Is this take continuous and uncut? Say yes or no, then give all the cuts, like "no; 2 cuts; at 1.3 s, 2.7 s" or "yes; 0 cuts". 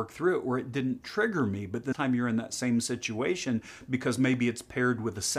no; 1 cut; at 1.9 s